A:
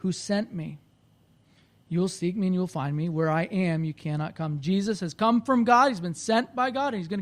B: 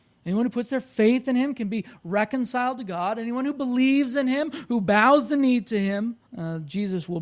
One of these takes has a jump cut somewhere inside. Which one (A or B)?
B